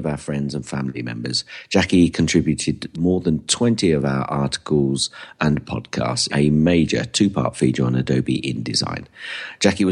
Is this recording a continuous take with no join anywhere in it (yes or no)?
no